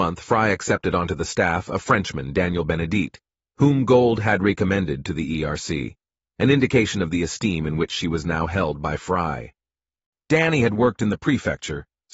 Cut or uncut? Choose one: uncut